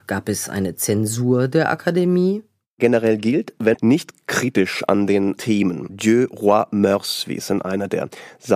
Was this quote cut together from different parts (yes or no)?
yes